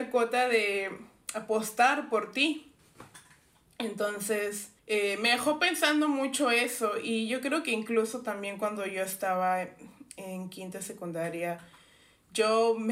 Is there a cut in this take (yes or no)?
yes